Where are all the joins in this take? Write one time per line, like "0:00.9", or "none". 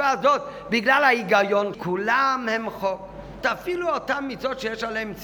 0:01.7
0:03.4